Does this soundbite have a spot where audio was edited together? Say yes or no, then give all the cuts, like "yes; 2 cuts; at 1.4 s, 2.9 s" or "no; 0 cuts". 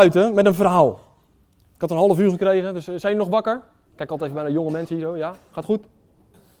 no; 0 cuts